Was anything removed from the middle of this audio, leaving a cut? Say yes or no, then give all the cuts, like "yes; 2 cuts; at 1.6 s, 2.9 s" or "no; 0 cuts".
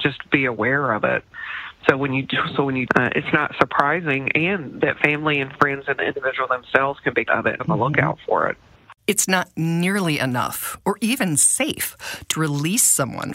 yes; 5 cuts; at 2.9 s, 7.3 s, 7.6 s, 9.0 s, 12.3 s